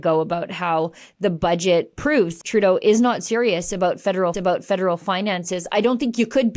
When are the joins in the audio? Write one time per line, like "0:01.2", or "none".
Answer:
0:02.4
0:04.3

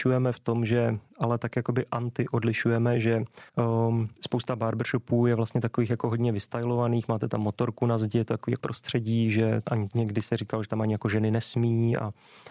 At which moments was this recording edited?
0:03.5
0:08.6
0:09.6

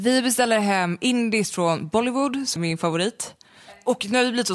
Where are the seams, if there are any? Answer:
0:02.6

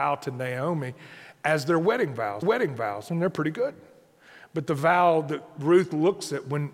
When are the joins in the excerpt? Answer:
0:02.4

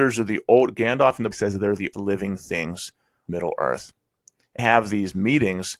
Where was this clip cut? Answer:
0:01.3
0:01.9
0:03.3
0:04.6

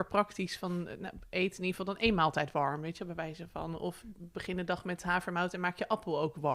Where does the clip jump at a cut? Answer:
none

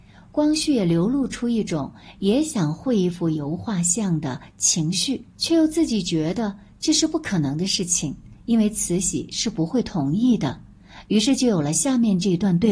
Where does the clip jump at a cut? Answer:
0:05.3

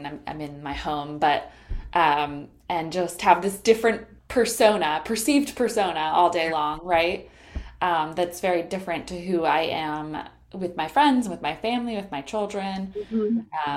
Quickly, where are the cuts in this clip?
0:04.2

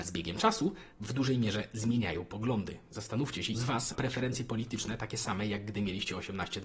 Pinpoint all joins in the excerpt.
0:00.9
0:03.5
0:03.9

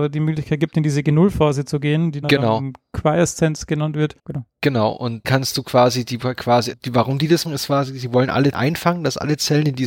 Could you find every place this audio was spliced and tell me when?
0:02.2
0:04.2
0:05.2
0:06.7
0:07.4
0:08.5

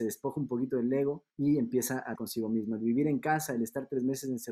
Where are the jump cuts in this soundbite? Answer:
0:01.3
0:02.1

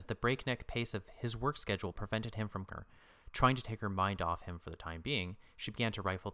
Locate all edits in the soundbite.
0:02.7

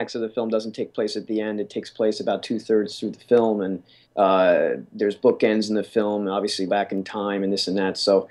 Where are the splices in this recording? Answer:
0:04.0
0:06.7

